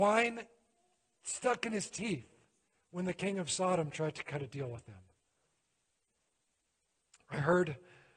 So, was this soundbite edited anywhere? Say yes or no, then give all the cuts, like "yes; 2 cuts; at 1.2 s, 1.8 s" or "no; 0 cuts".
no; 0 cuts